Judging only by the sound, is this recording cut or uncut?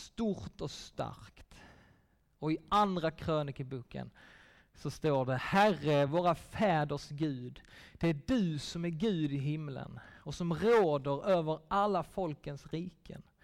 uncut